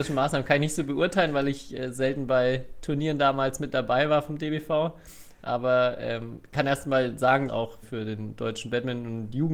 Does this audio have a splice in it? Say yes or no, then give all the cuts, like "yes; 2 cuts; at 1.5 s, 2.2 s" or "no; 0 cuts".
yes; 2 cuts; at 7.5 s, 7.8 s